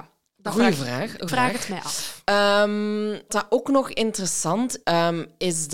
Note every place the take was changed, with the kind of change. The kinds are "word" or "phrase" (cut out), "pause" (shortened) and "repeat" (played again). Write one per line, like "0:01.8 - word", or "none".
0:01.3 - word
0:03.3 - word
0:04.8 - word